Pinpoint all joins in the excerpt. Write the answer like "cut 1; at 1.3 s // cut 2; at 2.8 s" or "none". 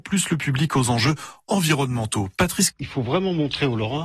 cut 1; at 2.7 s